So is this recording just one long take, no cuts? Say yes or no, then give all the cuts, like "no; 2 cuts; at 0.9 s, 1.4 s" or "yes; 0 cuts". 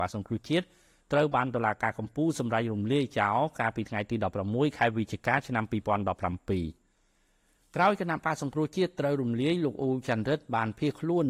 yes; 0 cuts